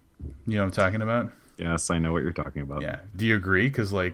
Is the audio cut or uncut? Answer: cut